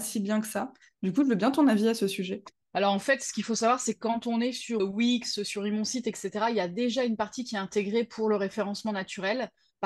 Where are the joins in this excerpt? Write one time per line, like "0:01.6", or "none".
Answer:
0:04.8